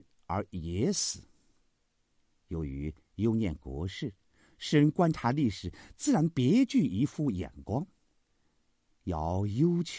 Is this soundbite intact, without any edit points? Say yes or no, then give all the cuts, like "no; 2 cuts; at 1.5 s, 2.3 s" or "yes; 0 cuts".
yes; 0 cuts